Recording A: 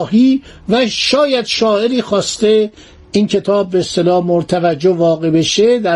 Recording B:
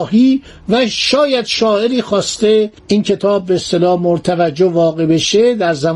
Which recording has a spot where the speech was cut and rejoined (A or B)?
B